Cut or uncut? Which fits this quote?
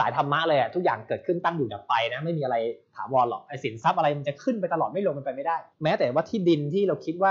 cut